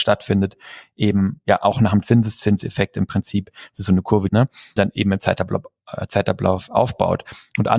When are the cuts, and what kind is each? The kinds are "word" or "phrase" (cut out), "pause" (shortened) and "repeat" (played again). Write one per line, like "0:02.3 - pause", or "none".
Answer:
0:04.3 - phrase
0:04.8 - word